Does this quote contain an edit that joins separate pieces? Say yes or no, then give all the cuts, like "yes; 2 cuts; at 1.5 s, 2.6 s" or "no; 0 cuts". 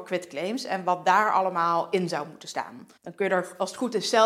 yes; 1 cut; at 3.0 s